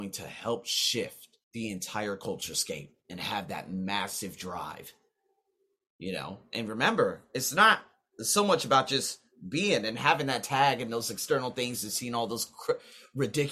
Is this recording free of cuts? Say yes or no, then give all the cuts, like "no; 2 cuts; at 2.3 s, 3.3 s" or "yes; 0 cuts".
no; 1 cut; at 1.4 s